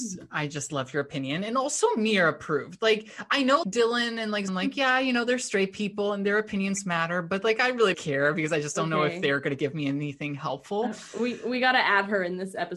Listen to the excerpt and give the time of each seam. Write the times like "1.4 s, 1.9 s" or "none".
3.6 s, 4.5 s, 7.9 s